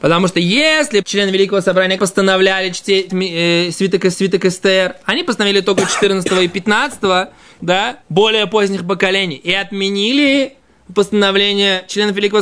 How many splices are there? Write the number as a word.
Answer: six